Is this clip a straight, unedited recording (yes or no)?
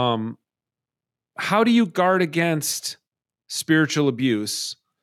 yes